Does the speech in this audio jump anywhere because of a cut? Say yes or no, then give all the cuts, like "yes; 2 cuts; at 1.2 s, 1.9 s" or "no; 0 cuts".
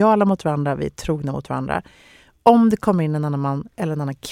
no; 0 cuts